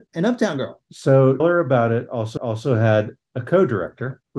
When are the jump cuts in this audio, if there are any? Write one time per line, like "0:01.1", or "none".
0:01.4
0:02.4